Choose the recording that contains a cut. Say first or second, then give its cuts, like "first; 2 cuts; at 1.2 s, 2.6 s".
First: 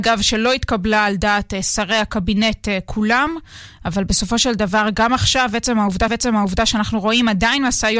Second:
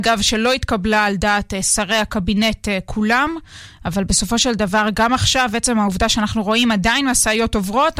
first; 1 cut; at 6.1 s